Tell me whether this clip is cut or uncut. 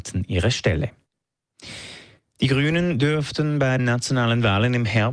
cut